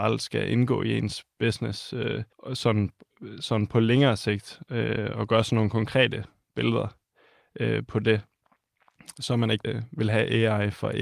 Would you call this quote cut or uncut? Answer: cut